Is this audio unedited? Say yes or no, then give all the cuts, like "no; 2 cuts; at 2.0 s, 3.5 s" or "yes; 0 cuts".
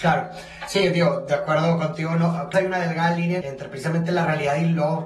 no; 2 cuts; at 2.5 s, 3.4 s